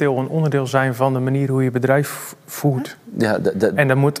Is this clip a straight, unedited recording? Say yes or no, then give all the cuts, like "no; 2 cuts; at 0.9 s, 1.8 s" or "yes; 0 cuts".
yes; 0 cuts